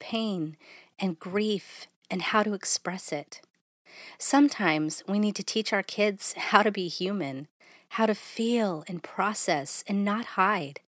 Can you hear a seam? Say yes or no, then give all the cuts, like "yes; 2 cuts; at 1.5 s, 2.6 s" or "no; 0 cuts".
no; 0 cuts